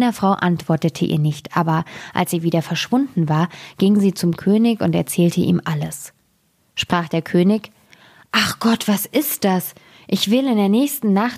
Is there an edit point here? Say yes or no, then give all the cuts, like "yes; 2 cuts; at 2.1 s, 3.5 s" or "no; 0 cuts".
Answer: no; 0 cuts